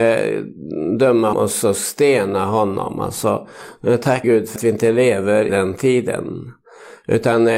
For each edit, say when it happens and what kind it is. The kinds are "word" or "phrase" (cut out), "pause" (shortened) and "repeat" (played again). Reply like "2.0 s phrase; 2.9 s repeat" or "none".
1.3 s word; 4.2 s word; 4.6 s word; 5.5 s word